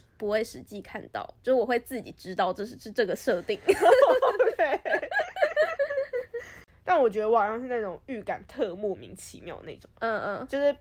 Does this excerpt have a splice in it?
no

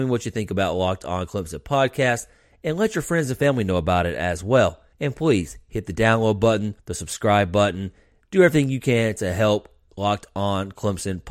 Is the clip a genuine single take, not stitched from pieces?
no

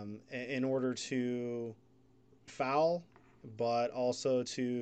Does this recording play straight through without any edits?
no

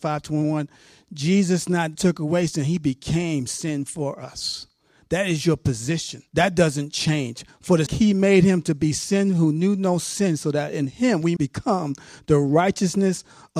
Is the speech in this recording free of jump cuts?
no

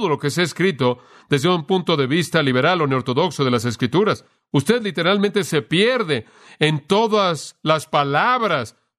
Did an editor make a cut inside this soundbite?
no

